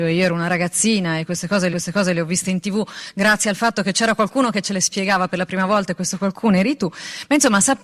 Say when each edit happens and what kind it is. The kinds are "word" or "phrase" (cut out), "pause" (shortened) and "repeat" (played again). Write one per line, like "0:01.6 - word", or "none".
0:01.7 - repeat